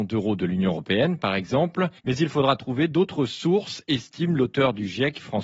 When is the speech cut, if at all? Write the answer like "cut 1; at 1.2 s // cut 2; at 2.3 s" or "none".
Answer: cut 1; at 2.0 s